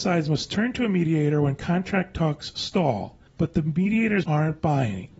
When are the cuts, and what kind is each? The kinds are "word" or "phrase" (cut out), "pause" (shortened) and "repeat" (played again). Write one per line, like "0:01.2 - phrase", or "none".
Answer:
0:03.3 - pause
0:04.2 - word

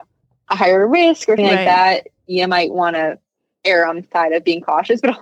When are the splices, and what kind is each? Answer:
0:01.4 - word

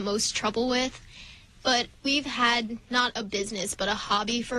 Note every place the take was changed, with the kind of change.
0:02.0 - pause

